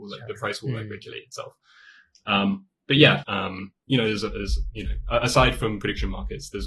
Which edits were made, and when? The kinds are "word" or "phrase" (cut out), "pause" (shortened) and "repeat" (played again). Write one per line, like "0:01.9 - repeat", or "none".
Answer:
0:03.2 - word